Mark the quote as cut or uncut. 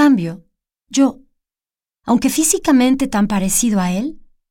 uncut